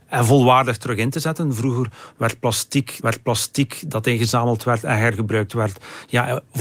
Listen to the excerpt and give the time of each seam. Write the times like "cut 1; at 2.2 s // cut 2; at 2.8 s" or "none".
cut 1; at 3.0 s